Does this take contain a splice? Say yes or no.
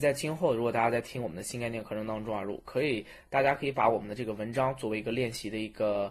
no